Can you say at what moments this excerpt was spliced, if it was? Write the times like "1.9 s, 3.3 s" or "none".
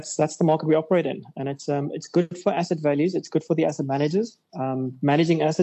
none